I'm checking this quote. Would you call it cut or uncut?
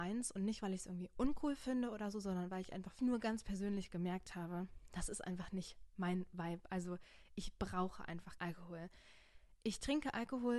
cut